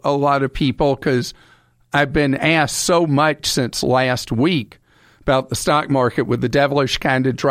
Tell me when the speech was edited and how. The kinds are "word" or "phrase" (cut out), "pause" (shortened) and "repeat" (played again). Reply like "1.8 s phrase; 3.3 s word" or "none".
none